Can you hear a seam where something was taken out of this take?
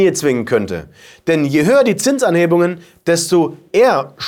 no; 0 cuts

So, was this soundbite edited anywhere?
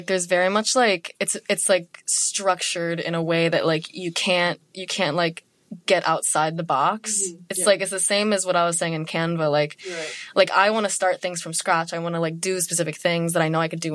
no; 0 cuts

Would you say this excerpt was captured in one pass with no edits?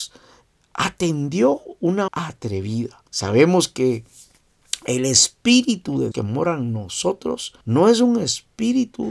no; 4 cuts; at 2.1 s, 3.1 s, 6.1 s, 7.6 s

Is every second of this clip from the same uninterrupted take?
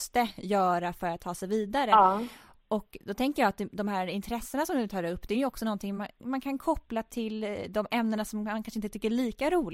yes; 0 cuts

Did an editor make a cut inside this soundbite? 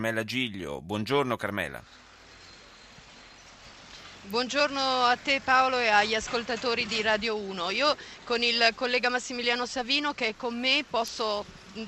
no; 0 cuts

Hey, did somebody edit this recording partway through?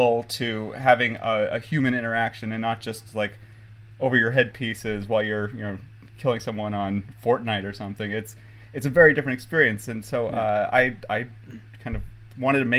no; 0 cuts

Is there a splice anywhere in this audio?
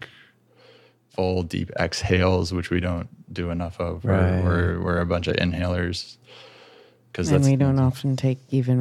no; 0 cuts

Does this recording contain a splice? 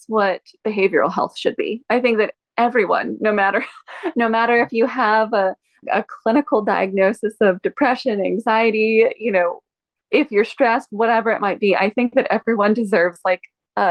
yes; 1 cut; at 5.8 s

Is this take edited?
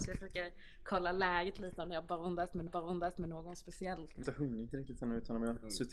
yes; 2 cuts; at 2.7 s, 4.2 s

